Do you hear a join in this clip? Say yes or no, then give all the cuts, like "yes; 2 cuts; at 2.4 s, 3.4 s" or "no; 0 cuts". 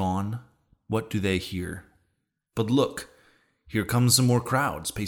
no; 0 cuts